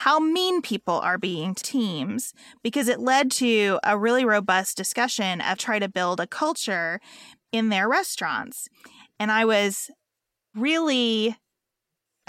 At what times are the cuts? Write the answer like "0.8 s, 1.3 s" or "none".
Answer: 1.6 s, 5.6 s

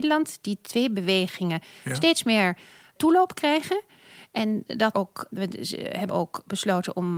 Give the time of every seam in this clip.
3.0 s, 4.9 s, 5.3 s, 6.1 s

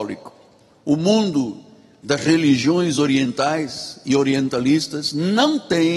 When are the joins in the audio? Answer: none

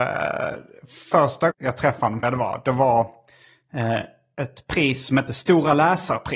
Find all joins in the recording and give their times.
1.5 s, 2.2 s

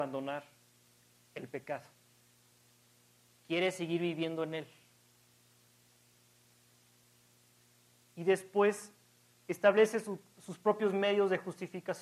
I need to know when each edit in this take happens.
none

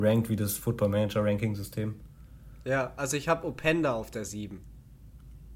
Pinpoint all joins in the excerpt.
none

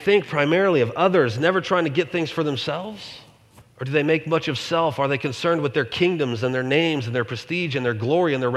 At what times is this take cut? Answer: 3.6 s

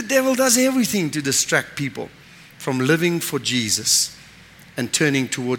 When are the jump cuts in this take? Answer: none

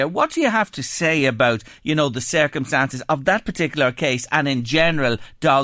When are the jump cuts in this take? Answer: none

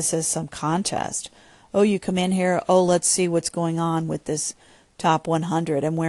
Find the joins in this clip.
none

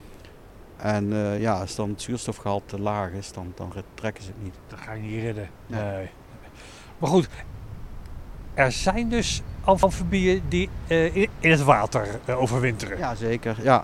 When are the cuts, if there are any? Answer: none

